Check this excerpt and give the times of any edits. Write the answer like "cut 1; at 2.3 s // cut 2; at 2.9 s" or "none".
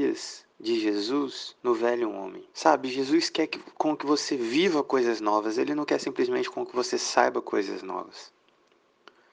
cut 1; at 1.6 s // cut 2; at 2.5 s